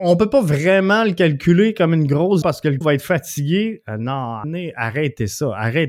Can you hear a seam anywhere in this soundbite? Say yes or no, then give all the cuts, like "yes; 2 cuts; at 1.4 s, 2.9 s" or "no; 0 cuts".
yes; 3 cuts; at 2.4 s, 2.8 s, 4.4 s